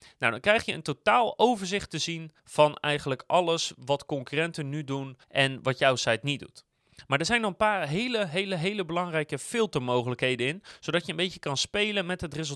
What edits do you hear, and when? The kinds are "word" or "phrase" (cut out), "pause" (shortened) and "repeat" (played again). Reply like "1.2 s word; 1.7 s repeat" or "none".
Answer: 2.4 s pause; 5.2 s pause